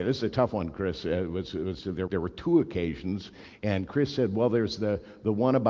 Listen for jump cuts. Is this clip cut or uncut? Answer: cut